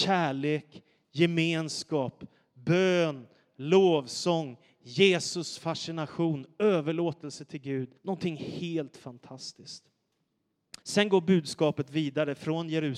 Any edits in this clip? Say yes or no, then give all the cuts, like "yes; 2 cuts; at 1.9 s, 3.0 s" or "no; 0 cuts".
yes; 2 cuts; at 8.0 s, 10.8 s